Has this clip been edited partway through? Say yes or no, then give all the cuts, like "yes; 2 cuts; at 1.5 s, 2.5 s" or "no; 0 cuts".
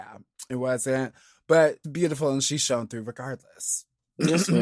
yes; 1 cut; at 1.8 s